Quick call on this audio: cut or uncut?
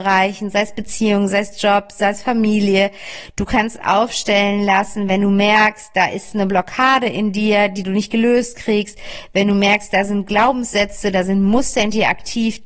uncut